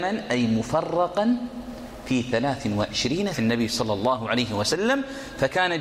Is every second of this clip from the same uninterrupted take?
no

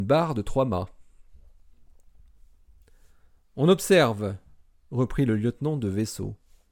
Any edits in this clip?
no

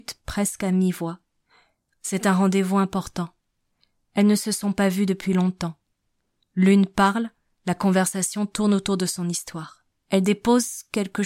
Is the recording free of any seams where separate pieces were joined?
yes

